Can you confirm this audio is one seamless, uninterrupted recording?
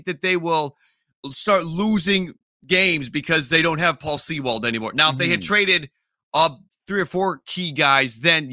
yes; 0 cuts

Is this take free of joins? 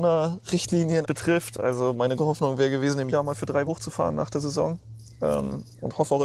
no; 4 cuts; at 1.0 s, 2.2 s, 3.1 s, 3.7 s

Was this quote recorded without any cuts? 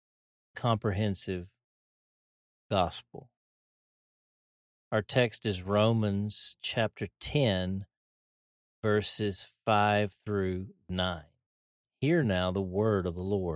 yes; 0 cuts

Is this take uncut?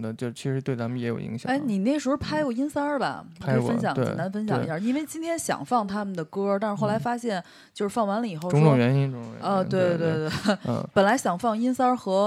yes; 0 cuts

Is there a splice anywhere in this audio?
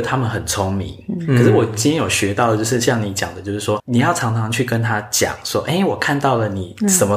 yes; 1 cut; at 3.8 s

